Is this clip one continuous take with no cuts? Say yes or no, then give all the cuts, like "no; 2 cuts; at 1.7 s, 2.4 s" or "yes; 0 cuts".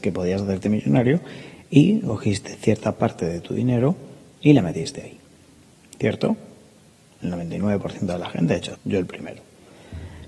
no; 1 cut; at 8.7 s